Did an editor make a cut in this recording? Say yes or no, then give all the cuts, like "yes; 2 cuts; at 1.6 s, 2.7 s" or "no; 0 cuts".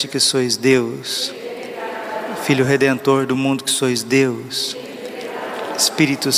no; 0 cuts